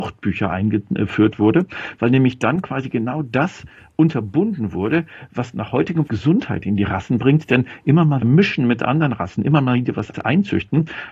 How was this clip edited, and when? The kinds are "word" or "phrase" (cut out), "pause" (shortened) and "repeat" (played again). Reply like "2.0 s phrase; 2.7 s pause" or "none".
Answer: 6.1 s word; 8.2 s word; 10.1 s word

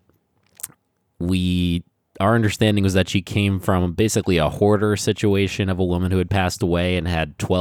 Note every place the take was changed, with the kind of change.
none

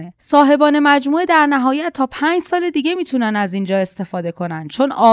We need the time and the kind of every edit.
none

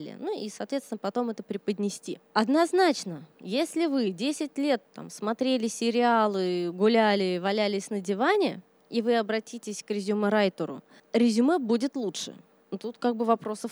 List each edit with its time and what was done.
2.2 s pause; 4.8 s phrase; 11.0 s pause

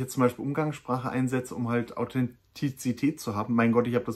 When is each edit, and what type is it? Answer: none

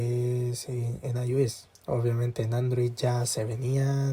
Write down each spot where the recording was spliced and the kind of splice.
1.8 s pause

